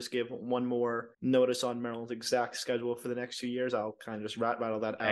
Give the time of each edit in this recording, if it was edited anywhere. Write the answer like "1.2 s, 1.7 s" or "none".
1.1 s